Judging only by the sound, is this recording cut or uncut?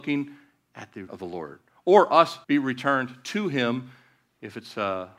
cut